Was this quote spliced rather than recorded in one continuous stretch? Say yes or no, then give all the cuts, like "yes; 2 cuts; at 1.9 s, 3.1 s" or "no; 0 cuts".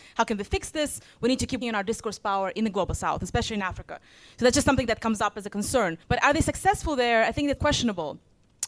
yes; 3 cuts; at 1.6 s, 6.0 s, 7.6 s